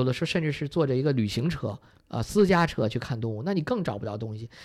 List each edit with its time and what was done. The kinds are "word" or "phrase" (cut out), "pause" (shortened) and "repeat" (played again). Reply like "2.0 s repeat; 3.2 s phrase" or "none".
none